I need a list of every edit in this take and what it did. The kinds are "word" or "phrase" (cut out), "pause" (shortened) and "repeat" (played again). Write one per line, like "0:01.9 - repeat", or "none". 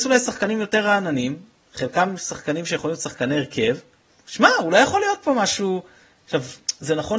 none